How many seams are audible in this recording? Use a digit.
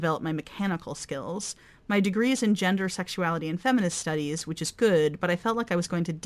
0